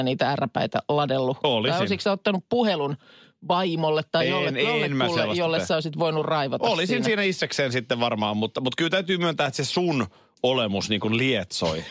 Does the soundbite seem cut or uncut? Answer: uncut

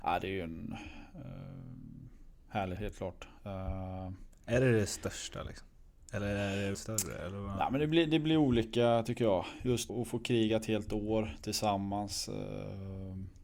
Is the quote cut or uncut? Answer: cut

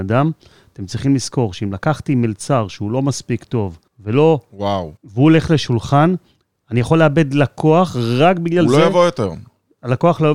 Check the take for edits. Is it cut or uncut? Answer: cut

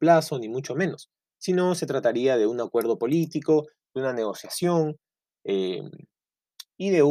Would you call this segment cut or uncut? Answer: uncut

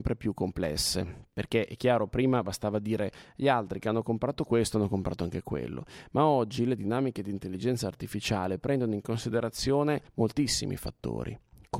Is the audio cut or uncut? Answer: cut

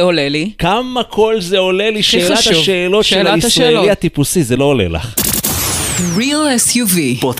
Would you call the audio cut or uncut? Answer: uncut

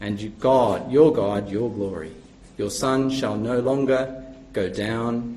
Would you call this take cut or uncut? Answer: cut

